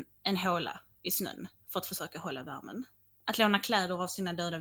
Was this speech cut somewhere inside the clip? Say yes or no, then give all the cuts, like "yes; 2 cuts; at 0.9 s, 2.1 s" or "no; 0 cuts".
no; 0 cuts